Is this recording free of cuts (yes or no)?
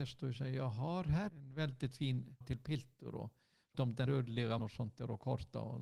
no